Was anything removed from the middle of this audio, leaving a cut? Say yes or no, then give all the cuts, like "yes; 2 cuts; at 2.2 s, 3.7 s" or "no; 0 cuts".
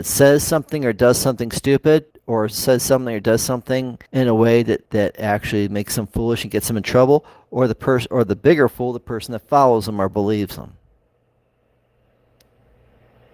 yes; 3 cuts; at 2.1 s, 4.1 s, 4.9 s